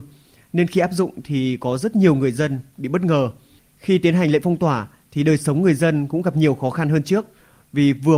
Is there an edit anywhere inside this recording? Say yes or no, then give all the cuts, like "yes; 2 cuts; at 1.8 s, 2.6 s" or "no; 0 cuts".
no; 0 cuts